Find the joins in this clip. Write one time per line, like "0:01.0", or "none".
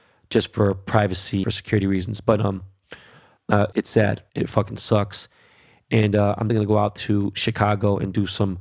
0:01.4
0:03.7
0:04.3
0:06.5